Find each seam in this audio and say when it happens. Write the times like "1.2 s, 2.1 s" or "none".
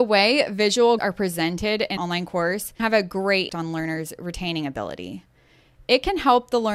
1.0 s, 2.0 s, 2.8 s, 3.5 s